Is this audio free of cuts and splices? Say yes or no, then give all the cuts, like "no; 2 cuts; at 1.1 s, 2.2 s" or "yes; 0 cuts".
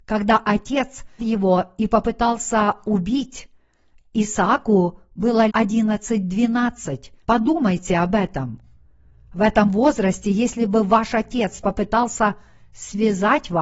no; 3 cuts; at 1.2 s, 5.5 s, 7.2 s